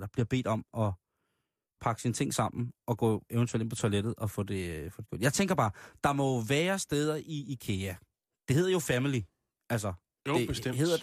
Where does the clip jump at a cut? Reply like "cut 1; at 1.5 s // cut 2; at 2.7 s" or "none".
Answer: none